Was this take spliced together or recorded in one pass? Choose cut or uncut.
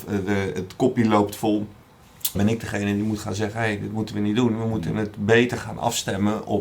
cut